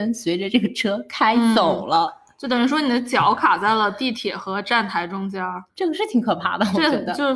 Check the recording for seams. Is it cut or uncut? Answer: cut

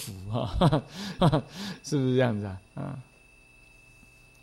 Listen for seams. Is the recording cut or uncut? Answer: cut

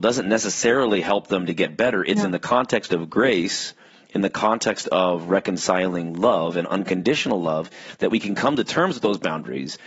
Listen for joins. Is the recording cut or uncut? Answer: uncut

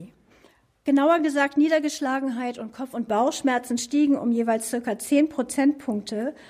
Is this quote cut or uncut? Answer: uncut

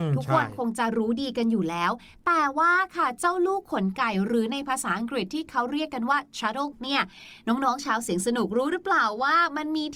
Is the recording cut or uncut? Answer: cut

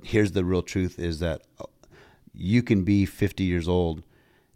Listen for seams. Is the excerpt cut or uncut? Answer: uncut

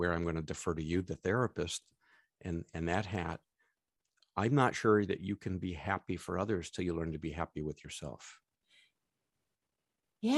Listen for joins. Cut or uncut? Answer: uncut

